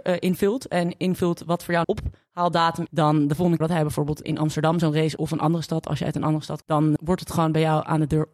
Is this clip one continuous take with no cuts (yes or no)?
no